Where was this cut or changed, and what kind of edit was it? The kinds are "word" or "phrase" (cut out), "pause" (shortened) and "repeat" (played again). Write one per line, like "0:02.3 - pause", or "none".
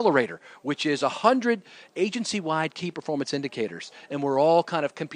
none